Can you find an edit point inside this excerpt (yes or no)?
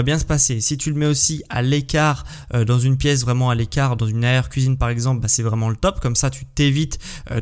no